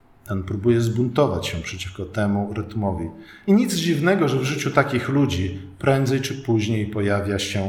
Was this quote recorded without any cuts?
yes; 0 cuts

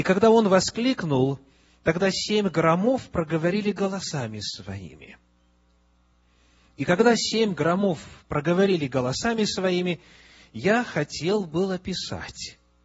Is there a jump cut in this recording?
no; 0 cuts

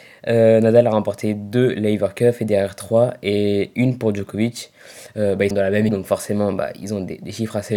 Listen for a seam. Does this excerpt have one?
yes; 2 cuts; at 5.5 s, 5.9 s

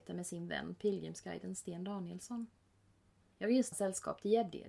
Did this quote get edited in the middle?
yes; 1 cut; at 3.7 s

